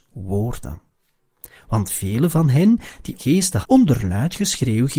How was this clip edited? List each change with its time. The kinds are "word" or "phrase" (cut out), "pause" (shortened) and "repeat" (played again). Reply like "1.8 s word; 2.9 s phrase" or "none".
3.2 s word; 3.6 s word